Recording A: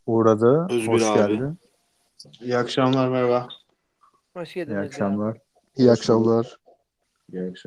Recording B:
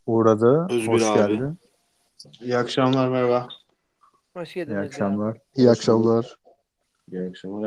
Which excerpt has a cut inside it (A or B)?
B